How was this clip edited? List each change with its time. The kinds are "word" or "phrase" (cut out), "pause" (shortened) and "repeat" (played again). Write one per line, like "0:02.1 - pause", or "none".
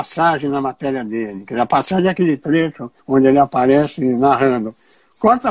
0:03.0 - pause